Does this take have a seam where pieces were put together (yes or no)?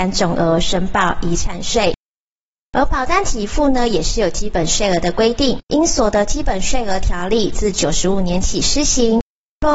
yes